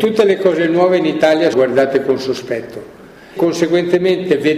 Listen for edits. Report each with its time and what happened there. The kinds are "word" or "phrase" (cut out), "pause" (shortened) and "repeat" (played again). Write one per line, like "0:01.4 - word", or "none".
0:01.5 - word
0:03.4 - word